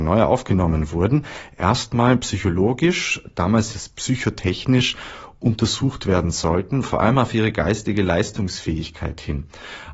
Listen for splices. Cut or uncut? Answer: cut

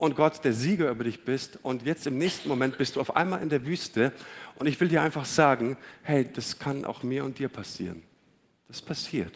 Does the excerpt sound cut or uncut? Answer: uncut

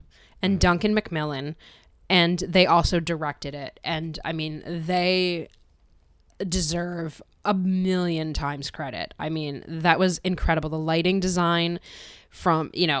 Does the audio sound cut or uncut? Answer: uncut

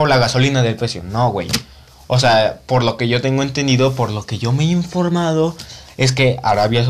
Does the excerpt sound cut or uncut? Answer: uncut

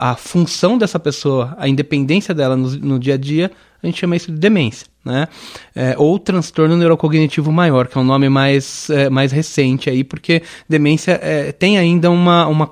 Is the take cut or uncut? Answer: uncut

